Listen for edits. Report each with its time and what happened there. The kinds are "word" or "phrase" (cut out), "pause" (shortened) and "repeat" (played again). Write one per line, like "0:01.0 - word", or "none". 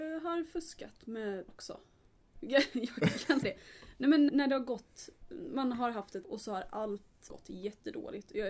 0:01.5 - word
0:03.4 - word
0:04.3 - word
0:06.2 - word
0:07.3 - word

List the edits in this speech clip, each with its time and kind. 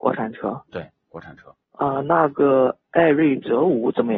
0:01.6 - pause

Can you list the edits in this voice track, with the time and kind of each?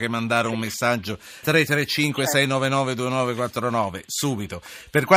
0:01.4 - word

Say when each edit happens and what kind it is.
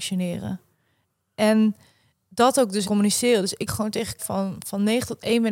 0:02.8 - word
0:03.7 - word
0:04.2 - word

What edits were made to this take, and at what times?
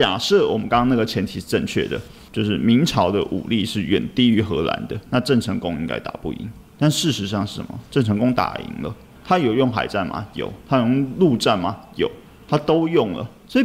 0:05.1 - word

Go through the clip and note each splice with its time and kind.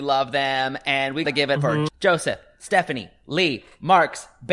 0:01.2 - word
0:01.6 - word
0:01.9 - word

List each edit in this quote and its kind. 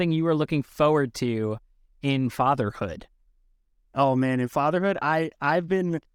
none

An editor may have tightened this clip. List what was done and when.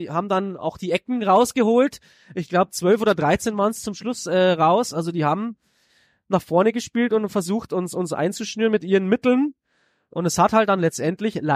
none

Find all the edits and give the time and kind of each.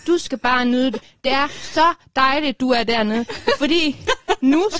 none

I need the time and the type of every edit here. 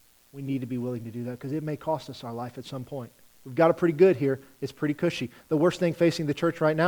none

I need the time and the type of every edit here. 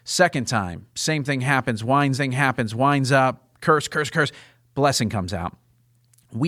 0:02.1 - repeat

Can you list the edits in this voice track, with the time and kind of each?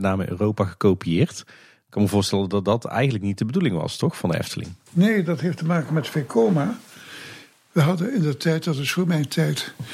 none

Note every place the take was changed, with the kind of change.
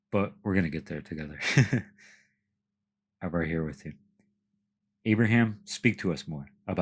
none

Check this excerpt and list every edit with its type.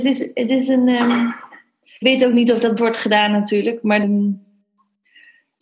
0:02.0 - word
0:02.8 - word
0:04.0 - word

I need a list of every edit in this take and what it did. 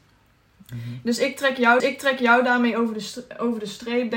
0:01.8 - repeat

